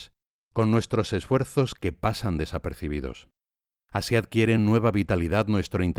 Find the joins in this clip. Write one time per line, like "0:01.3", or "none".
none